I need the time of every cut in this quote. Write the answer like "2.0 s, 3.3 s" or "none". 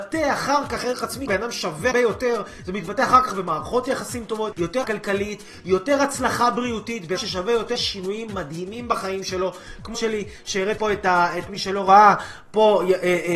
1.3 s, 1.9 s, 4.5 s, 4.8 s, 7.2 s, 7.8 s, 9.9 s, 10.8 s, 11.5 s